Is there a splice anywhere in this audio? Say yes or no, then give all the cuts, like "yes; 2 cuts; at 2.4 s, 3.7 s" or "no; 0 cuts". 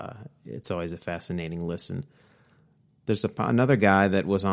no; 0 cuts